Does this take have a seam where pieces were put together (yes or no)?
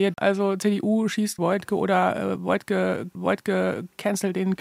yes